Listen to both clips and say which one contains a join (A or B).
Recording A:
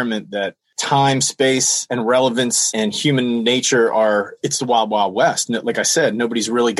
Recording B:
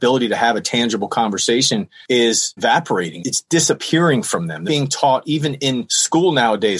B